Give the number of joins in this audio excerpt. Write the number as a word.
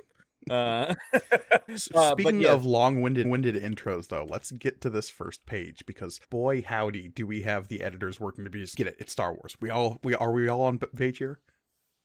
six